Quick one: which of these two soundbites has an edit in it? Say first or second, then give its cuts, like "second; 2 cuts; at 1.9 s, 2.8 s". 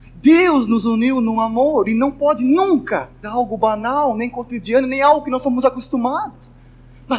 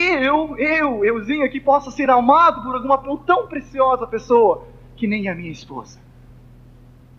first; 1 cut; at 3.2 s